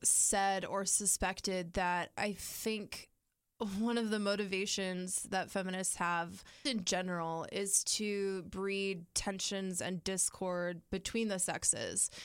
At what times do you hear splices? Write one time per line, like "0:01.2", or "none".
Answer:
0:06.7